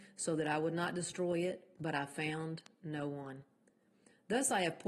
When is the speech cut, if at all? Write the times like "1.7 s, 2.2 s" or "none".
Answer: none